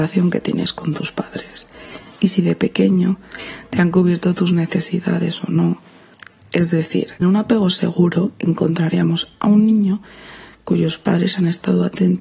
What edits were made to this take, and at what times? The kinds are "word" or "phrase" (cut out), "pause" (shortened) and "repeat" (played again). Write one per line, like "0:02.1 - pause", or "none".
0:07.2 - word